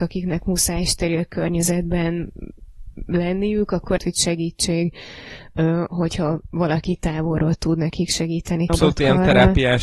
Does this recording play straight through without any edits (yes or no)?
no